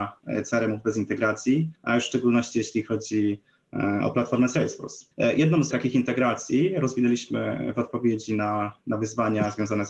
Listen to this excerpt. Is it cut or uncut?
cut